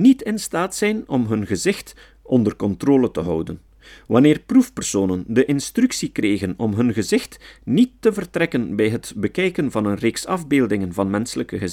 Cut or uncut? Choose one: uncut